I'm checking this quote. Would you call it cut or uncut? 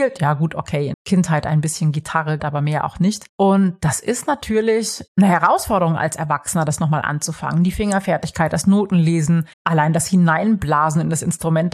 cut